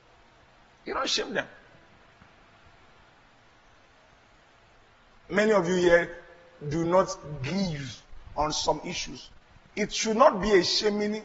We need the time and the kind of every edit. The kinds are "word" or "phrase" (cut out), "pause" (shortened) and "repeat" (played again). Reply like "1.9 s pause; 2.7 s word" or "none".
none